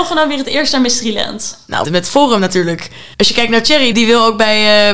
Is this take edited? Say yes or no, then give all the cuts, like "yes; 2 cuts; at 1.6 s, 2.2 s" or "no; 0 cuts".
yes; 3 cuts; at 1.8 s, 3.1 s, 3.9 s